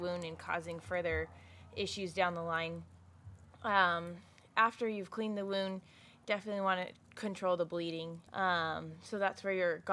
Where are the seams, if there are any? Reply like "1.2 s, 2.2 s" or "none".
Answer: 7.0 s, 8.3 s